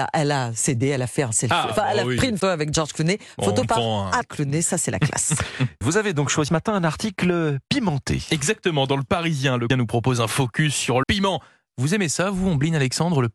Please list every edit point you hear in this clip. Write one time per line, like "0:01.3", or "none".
0:02.4
0:03.6
0:04.2
0:05.8
0:06.5
0:09.7
0:11.0